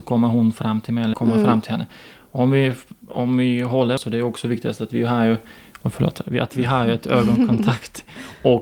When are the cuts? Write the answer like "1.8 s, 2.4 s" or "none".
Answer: 1.1 s, 4.0 s